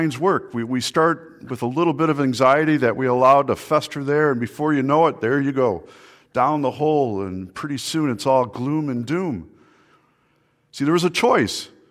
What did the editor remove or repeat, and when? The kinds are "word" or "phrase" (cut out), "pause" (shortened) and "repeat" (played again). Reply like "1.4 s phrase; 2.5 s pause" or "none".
none